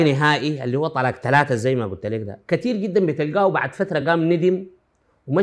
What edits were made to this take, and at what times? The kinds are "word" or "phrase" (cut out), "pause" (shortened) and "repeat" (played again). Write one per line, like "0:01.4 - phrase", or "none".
none